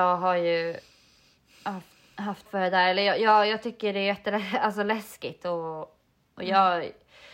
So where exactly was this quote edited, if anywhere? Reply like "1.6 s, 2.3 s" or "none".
2.5 s